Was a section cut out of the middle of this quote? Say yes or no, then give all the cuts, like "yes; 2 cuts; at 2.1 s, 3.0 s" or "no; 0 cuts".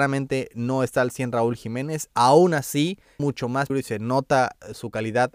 yes; 2 cuts; at 3.2 s, 3.7 s